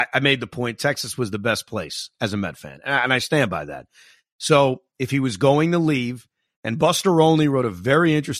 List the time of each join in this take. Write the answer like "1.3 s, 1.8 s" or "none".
none